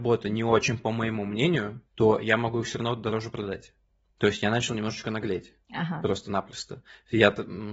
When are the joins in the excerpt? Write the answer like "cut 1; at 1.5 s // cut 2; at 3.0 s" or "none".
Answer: cut 1; at 1.9 s // cut 2; at 5.6 s